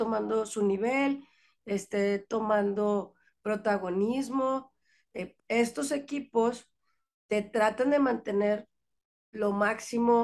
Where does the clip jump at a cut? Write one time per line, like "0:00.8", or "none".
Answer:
0:05.4

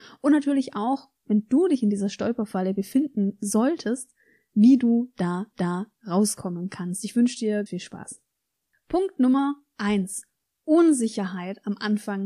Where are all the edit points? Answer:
0:05.5
0:07.7

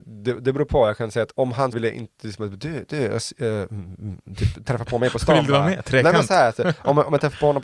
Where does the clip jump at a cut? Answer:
0:01.3
0:01.7

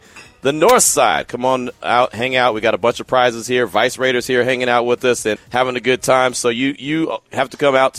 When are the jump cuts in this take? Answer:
0:05.4

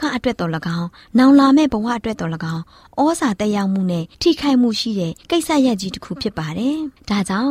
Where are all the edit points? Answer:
0:04.1
0:05.2

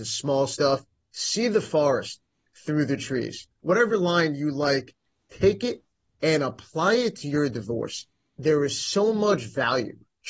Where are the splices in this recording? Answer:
none

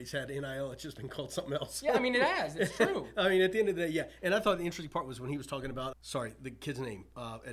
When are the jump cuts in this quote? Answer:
0:05.9

